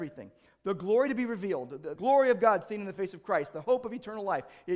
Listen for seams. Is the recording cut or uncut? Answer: cut